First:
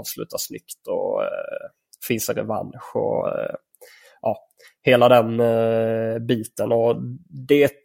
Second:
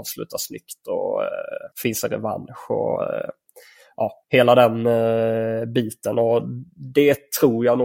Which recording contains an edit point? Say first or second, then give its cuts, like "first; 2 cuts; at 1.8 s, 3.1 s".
second; 2 cuts; at 1.7 s, 4.2 s